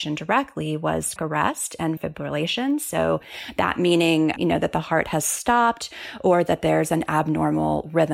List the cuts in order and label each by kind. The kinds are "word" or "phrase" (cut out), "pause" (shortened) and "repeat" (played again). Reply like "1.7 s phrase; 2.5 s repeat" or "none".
1.2 s word; 2.0 s word; 4.4 s word

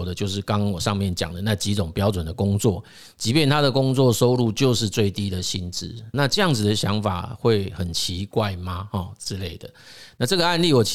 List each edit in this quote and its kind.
6.1 s word

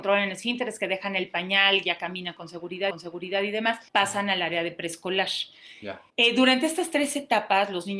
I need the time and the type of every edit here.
2.9 s repeat; 3.9 s pause; 6.1 s pause

